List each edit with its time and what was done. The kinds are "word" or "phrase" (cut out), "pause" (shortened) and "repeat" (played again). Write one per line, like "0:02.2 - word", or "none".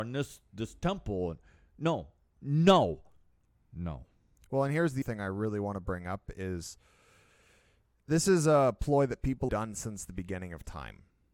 0:05.0 - word
0:09.5 - word